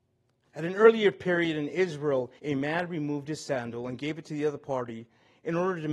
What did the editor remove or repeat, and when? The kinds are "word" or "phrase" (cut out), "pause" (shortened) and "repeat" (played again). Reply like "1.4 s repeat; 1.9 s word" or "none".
2.4 s pause